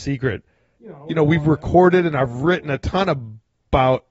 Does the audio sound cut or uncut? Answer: uncut